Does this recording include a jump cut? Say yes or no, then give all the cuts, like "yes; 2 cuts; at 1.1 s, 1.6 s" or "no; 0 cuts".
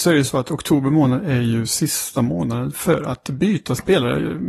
no; 0 cuts